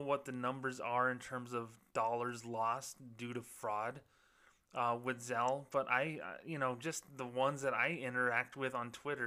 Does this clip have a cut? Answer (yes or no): no